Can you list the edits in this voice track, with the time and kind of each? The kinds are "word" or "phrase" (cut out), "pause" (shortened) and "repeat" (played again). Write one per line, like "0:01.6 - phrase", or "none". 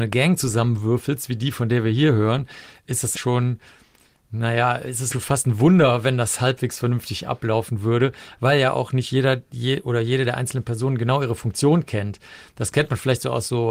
0:03.1 - word
0:05.1 - word